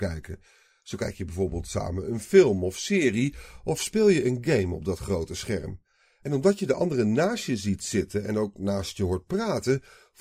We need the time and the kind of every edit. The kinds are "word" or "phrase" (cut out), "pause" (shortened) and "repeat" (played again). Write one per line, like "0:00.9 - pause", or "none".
none